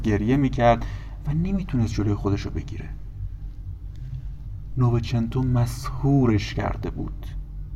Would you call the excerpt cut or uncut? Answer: uncut